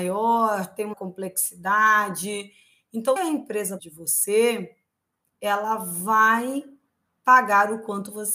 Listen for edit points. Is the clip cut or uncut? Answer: cut